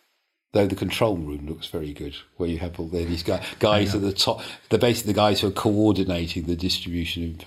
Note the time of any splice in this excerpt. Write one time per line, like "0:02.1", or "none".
none